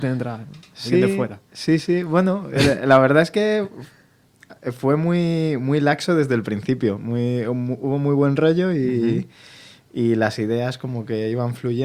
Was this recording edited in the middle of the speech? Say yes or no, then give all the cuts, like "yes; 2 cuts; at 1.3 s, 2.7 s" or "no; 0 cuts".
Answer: no; 0 cuts